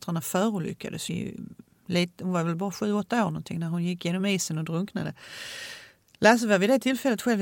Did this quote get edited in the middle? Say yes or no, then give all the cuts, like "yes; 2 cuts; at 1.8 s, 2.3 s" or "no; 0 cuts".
yes; 1 cut; at 1.1 s